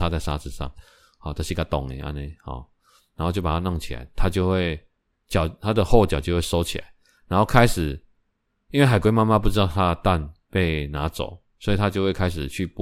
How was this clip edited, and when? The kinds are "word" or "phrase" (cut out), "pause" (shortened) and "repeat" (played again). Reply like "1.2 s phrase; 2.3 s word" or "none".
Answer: none